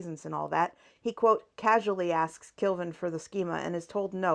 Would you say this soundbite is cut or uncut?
uncut